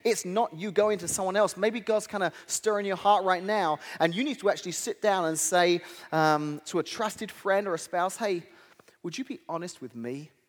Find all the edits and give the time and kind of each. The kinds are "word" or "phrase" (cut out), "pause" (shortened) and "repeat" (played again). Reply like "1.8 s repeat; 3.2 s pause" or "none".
none